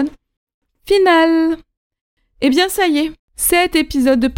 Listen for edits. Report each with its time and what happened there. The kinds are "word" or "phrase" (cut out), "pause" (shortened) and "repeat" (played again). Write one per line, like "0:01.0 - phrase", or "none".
0:03.2 - pause

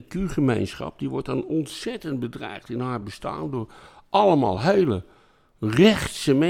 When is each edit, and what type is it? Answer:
none

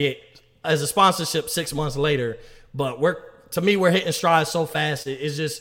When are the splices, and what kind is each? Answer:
none

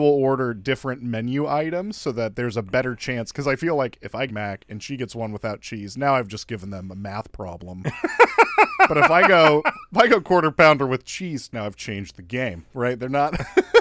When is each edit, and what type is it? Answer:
0:04.3 - phrase

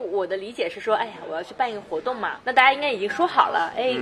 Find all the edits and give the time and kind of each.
0:02.4 - pause

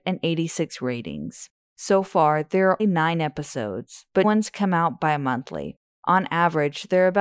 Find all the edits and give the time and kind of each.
0:02.8 - word
0:04.2 - word

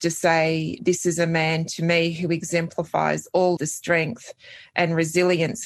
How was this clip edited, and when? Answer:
0:03.6 - word

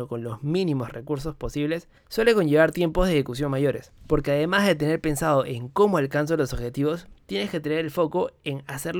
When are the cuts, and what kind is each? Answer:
0:02.0 - pause
0:04.0 - pause

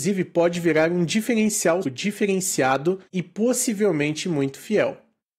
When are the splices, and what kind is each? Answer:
0:01.8 - phrase
0:03.1 - pause

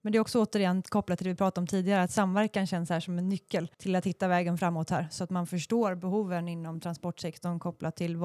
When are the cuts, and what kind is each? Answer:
0:03.7 - pause

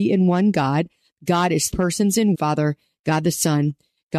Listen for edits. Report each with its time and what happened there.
0:01.7 - word
0:02.3 - phrase

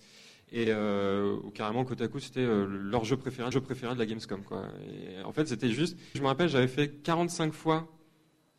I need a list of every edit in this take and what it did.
0:03.5 - repeat
0:06.1 - phrase

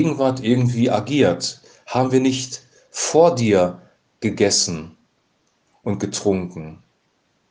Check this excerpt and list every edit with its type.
none

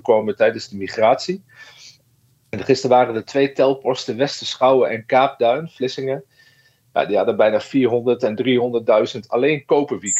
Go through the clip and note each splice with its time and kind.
none

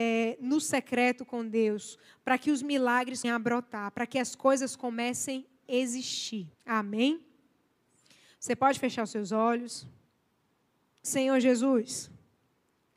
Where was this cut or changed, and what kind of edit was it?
0:03.2 - word
0:06.5 - pause

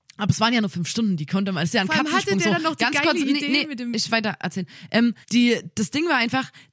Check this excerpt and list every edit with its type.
0:04.1 - word
0:05.2 - pause

